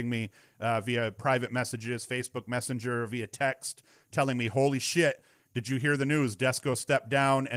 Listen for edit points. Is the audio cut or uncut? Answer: uncut